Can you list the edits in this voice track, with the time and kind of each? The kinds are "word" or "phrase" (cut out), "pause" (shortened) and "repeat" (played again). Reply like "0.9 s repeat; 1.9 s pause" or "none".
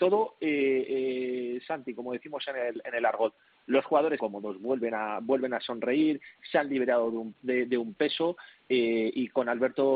4.2 s word